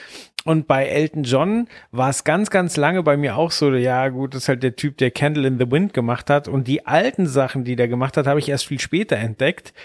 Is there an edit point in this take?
no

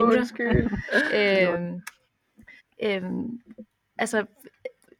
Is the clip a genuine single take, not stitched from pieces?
no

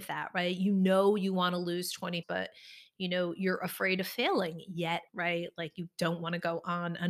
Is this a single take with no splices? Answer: no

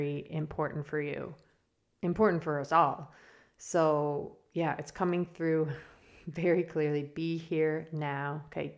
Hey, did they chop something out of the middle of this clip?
no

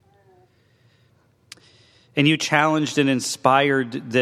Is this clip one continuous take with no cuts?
yes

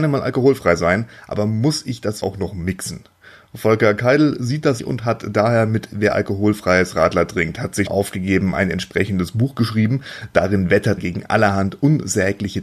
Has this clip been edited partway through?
yes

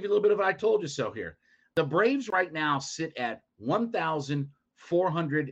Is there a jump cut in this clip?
no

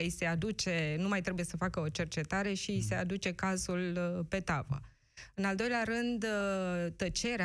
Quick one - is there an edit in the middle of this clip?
no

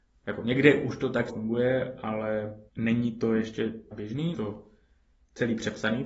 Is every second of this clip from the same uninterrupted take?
no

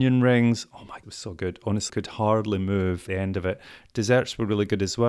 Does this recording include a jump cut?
yes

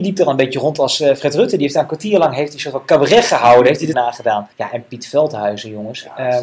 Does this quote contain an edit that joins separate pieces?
yes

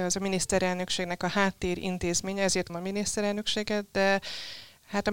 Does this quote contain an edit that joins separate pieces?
yes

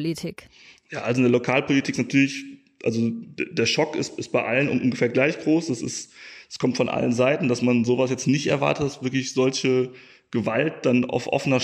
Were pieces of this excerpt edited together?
no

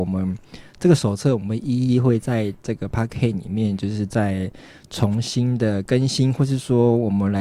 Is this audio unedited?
yes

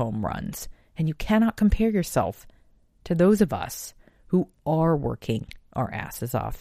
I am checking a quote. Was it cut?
no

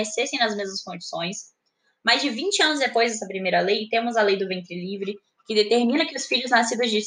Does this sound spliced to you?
no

